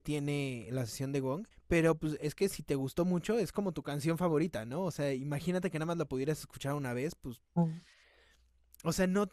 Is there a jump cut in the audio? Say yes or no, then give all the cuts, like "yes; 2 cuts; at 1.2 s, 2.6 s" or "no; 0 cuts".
yes; 1 cut; at 1.5 s